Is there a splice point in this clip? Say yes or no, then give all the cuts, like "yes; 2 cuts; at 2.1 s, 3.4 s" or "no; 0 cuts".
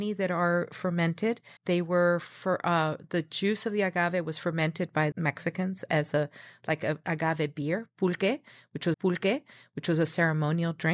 yes; 3 cuts; at 1.6 s, 5.1 s, 8.9 s